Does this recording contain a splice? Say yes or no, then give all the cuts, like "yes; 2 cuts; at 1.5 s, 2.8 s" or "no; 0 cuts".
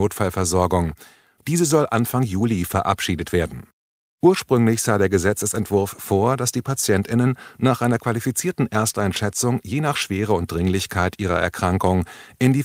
no; 0 cuts